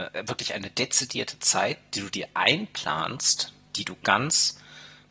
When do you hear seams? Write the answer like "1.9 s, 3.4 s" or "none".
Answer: none